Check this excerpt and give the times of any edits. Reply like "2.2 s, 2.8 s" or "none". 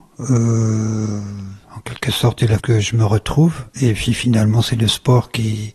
1.6 s, 2.6 s

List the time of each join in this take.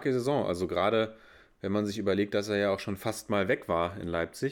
none

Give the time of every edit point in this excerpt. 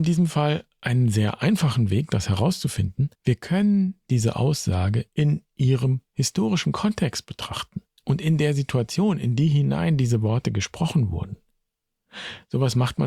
3.1 s, 7.9 s

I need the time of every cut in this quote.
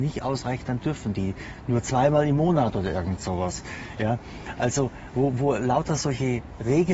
none

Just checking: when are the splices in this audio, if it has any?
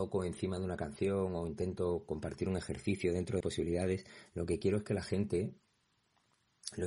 3.4 s

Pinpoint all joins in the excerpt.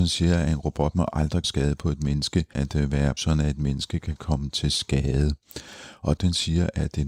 1.4 s, 2.5 s, 3.2 s, 6.2 s

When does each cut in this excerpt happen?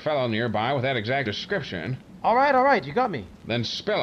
1.3 s

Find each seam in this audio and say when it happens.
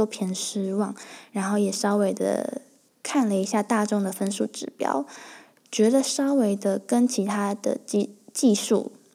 none

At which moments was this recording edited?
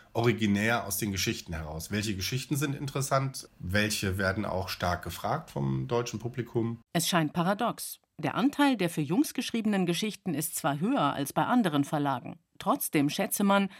6.9 s, 12.5 s

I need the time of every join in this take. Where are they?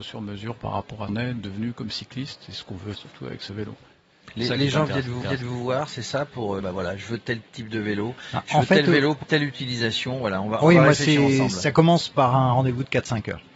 1.1 s, 2.9 s, 5.2 s, 6.6 s, 9.2 s

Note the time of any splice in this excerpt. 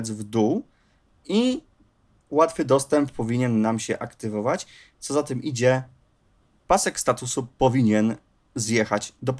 none

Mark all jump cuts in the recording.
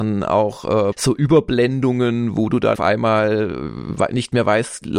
0.9 s, 2.8 s

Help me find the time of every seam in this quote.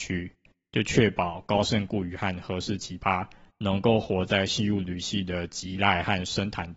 none

